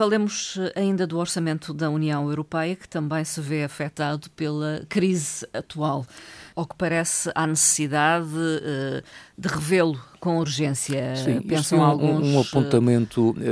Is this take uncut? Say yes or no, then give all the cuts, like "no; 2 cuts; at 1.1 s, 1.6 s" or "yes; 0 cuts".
yes; 0 cuts